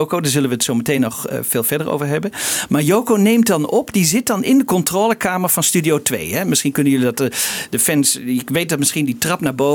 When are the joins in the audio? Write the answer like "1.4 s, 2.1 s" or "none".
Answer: none